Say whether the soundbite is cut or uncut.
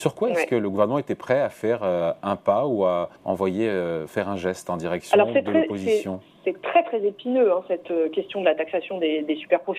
cut